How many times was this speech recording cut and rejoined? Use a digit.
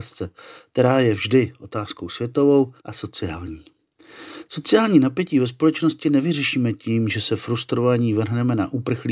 1